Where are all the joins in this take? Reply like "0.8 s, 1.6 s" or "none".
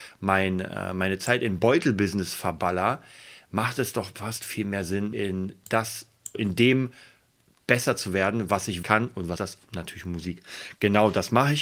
5.1 s, 6.3 s, 8.8 s, 9.4 s

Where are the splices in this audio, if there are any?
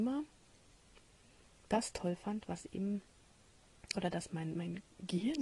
none

